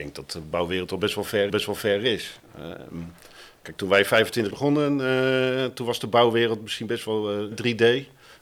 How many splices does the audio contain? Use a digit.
3